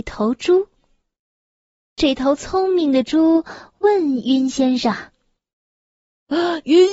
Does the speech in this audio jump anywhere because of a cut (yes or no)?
no